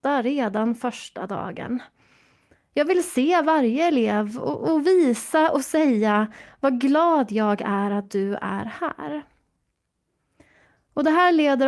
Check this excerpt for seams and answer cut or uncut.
uncut